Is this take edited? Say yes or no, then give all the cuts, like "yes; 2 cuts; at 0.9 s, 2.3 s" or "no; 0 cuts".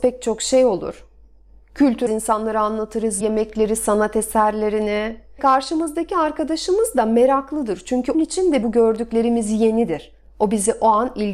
yes; 5 cuts; at 2.1 s, 3.2 s, 5.4 s, 8.1 s, 8.6 s